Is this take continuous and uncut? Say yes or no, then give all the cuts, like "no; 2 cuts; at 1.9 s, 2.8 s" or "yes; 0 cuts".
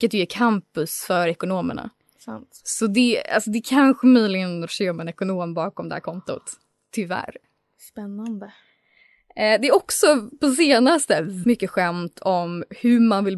no; 2 cuts; at 4.7 s, 11.4 s